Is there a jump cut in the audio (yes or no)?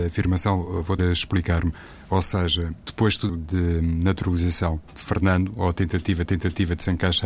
yes